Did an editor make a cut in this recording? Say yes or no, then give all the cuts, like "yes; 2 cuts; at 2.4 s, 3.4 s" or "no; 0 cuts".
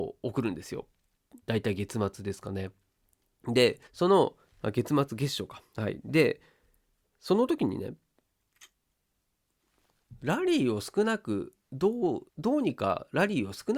yes; 3 cuts; at 1.4 s, 3.9 s, 12.3 s